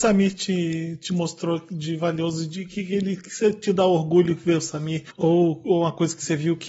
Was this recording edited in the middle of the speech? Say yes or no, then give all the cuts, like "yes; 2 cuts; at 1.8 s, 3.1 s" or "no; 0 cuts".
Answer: yes; 1 cut; at 5.1 s